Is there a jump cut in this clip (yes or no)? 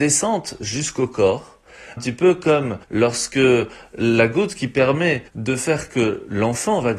yes